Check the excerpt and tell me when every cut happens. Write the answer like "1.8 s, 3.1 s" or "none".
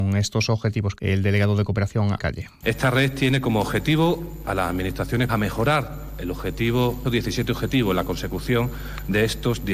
1.0 s, 2.2 s, 4.4 s, 5.3 s, 7.0 s